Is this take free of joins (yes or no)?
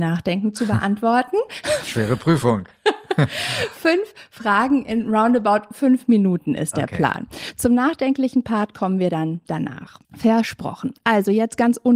no